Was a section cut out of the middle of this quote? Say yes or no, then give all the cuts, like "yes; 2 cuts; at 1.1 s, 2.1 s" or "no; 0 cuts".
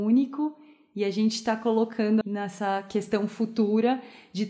yes; 1 cut; at 2.2 s